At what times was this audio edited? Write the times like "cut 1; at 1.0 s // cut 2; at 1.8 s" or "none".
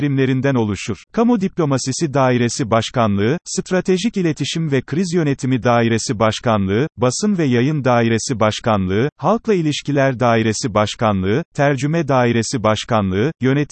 cut 1; at 1.0 s